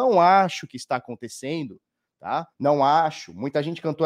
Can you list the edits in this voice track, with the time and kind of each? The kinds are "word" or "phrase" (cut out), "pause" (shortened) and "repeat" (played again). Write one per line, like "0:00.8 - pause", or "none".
0:02.5 - pause